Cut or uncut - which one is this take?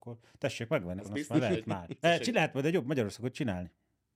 cut